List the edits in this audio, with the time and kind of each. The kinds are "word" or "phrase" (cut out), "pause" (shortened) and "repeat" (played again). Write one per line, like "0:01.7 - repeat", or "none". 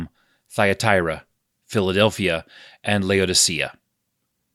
0:01.5 - word